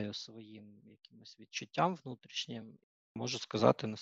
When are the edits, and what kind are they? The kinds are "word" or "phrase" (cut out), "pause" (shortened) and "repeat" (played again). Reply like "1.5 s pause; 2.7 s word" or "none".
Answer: none